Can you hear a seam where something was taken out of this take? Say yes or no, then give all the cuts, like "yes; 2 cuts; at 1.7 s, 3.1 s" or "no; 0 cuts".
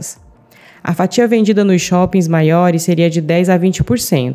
no; 0 cuts